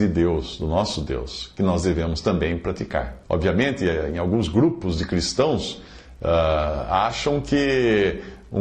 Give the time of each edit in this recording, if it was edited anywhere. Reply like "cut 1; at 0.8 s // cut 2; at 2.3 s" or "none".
cut 1; at 3.2 s